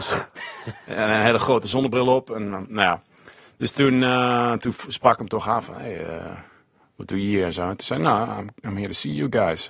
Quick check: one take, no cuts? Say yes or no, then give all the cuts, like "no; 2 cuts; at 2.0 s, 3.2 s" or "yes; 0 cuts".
yes; 0 cuts